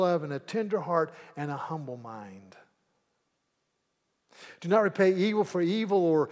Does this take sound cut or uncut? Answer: uncut